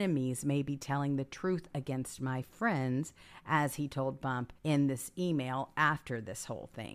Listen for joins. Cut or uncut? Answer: cut